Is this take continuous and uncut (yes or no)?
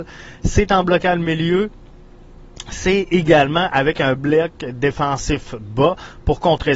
yes